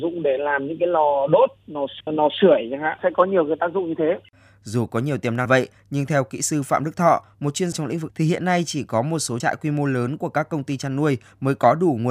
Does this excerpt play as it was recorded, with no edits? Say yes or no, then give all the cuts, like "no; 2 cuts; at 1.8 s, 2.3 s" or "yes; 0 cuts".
no; 5 cuts; at 2.0 s, 5.5 s, 7.7 s, 8.1 s, 9.4 s